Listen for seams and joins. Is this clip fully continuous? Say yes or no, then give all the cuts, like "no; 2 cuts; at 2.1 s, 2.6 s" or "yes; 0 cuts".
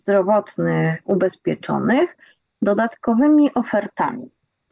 yes; 0 cuts